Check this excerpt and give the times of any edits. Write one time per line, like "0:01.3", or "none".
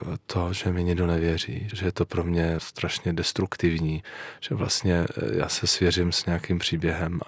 0:01.7
0:02.6